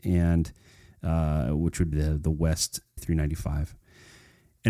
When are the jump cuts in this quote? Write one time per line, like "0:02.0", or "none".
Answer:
0:01.9
0:03.0